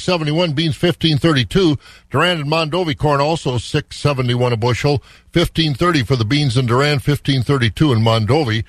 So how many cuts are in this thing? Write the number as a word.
zero